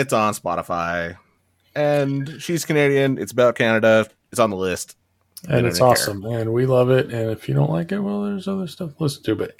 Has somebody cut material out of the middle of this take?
no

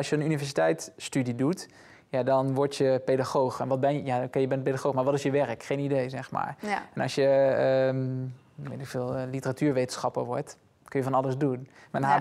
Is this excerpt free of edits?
yes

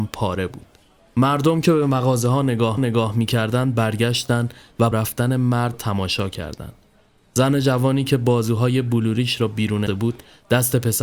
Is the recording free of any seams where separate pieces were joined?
no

